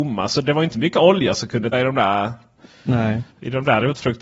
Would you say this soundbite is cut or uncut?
cut